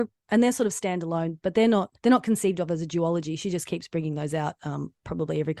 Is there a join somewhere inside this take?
yes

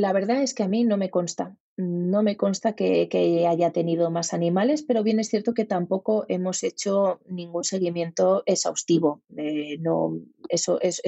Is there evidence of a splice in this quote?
no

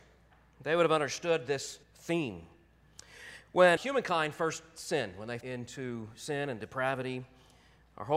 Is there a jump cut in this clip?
yes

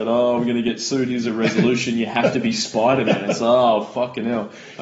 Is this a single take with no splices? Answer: yes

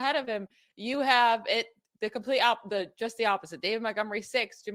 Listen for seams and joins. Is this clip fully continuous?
yes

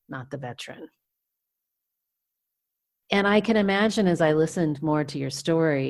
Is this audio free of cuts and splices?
yes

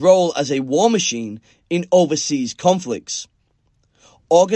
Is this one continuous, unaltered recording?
yes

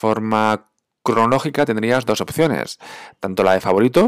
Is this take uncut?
yes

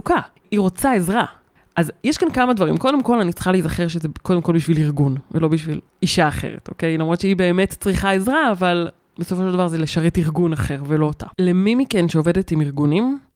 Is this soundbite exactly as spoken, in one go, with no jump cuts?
no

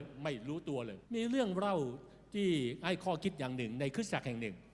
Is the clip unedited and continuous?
no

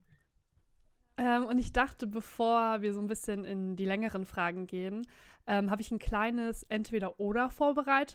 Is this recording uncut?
yes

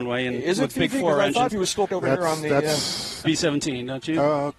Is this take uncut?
no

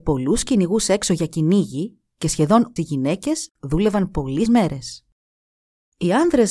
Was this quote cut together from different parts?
yes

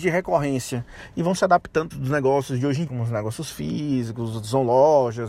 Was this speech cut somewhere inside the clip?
yes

